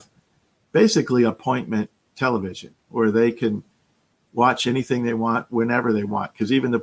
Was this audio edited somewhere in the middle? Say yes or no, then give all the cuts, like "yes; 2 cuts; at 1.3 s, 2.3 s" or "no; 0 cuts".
no; 0 cuts